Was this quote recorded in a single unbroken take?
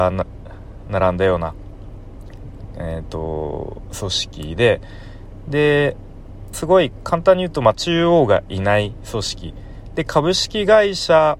no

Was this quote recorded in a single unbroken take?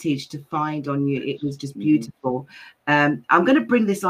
yes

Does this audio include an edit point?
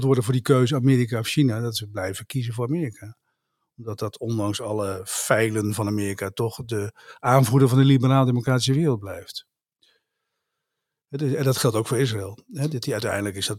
no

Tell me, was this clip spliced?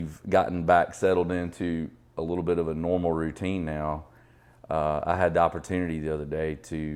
no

